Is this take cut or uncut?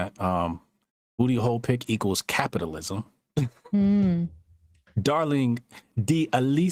uncut